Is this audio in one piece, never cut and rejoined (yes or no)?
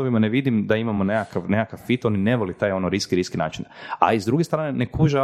yes